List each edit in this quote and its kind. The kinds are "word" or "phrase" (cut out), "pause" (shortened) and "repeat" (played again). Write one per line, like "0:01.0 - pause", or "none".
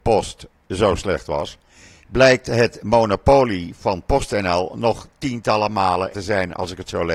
0:06.1 - word